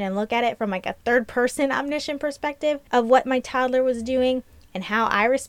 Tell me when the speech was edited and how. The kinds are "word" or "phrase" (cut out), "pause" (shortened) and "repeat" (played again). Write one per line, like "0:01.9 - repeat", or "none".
none